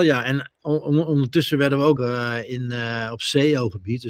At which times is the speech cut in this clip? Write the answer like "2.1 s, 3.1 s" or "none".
2.0 s

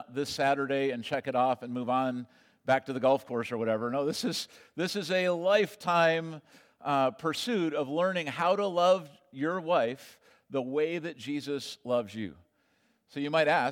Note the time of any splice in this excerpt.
none

